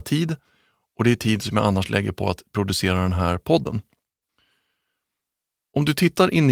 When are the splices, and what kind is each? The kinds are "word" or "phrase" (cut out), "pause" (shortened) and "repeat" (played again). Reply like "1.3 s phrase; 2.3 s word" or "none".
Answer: none